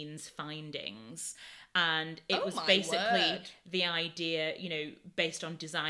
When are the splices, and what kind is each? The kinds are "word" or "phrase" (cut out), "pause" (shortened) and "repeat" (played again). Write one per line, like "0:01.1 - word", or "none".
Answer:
none